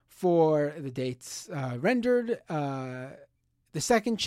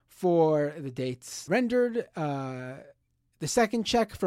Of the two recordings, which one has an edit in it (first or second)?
second